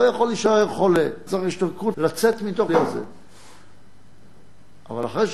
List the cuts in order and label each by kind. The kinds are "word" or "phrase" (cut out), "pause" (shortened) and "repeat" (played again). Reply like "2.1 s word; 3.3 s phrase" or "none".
1.3 s word; 1.9 s word; 2.7 s word